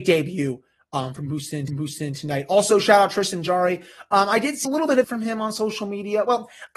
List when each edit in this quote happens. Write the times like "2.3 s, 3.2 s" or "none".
1.7 s, 4.6 s, 5.0 s